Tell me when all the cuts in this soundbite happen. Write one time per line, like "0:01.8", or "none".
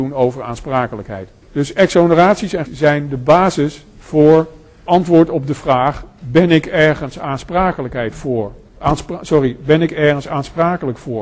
0:01.4
0:02.7
0:04.9